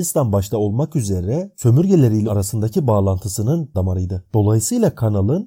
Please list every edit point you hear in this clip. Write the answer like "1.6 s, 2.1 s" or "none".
2.3 s, 3.7 s